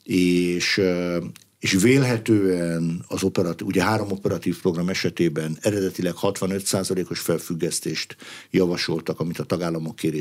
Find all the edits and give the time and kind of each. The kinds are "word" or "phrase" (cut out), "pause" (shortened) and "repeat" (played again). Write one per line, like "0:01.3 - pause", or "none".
none